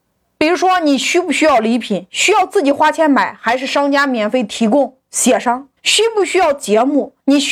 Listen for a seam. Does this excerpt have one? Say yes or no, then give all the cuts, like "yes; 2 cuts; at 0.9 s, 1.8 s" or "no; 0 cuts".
yes; 1 cut; at 5.8 s